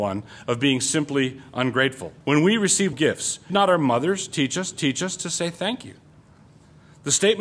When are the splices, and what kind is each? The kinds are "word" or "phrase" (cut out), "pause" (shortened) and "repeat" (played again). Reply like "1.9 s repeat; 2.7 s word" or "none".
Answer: 2.2 s pause; 2.9 s word; 3.5 s word; 4.7 s repeat